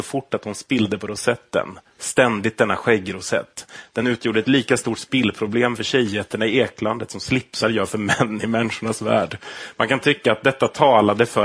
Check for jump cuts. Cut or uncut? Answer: uncut